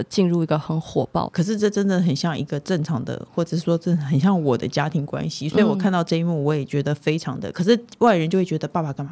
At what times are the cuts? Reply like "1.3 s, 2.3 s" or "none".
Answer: 1.3 s